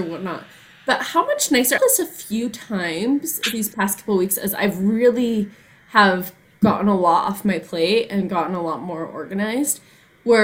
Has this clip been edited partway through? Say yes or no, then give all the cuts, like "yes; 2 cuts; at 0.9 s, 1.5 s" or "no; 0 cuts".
yes; 1 cut; at 1.8 s